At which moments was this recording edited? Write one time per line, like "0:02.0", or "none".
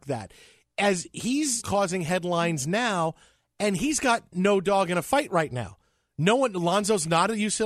0:01.6